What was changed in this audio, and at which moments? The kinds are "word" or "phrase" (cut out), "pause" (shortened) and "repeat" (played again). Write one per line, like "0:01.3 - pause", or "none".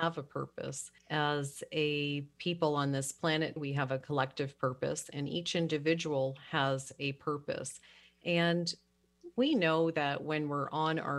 0:01.0 - pause
0:03.6 - word